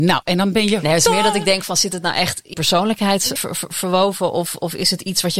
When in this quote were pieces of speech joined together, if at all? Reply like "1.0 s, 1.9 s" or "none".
2.5 s, 3.4 s